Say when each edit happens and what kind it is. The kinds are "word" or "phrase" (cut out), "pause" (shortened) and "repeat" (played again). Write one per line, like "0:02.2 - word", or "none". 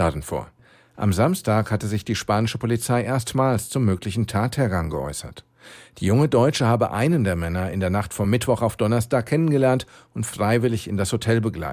none